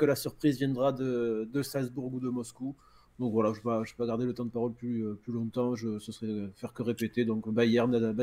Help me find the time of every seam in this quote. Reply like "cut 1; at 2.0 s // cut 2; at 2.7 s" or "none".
none